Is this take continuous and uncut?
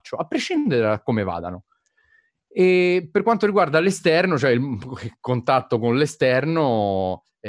yes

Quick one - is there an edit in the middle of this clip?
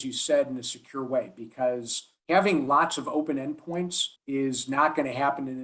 yes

